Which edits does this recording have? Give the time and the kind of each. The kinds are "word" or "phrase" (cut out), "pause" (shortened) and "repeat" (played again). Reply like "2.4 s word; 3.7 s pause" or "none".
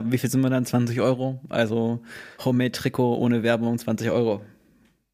2.3 s pause